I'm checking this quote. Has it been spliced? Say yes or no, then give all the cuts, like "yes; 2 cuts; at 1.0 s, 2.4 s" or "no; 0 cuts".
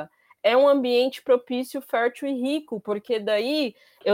no; 0 cuts